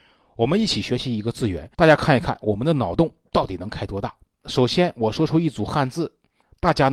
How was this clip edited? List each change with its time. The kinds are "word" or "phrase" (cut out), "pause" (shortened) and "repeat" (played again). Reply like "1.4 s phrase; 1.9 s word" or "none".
1.7 s pause